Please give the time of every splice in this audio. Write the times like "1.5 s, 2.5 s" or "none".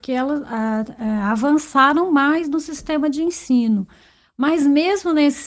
none